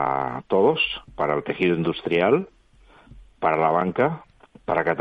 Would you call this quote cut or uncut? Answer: cut